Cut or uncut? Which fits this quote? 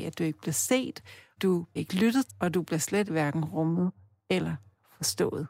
cut